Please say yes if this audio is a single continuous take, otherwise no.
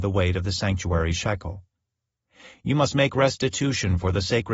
yes